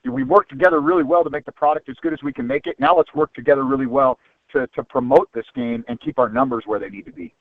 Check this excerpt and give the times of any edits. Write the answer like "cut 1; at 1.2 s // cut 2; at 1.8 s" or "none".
none